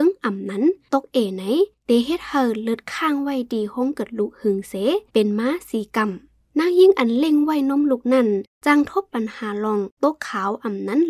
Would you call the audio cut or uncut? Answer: cut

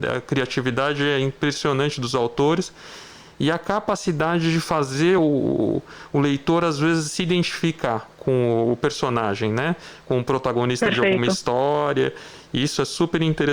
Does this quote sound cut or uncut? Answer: uncut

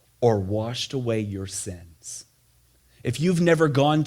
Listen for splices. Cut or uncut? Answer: uncut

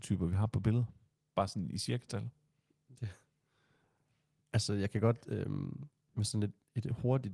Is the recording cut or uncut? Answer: uncut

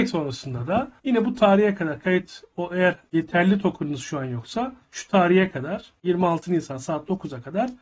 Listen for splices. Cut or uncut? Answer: cut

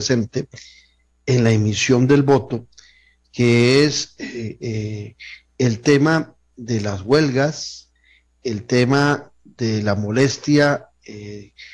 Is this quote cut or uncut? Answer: uncut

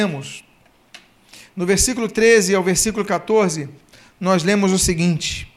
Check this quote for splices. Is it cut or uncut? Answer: uncut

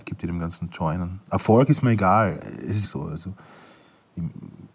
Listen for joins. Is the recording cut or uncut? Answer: cut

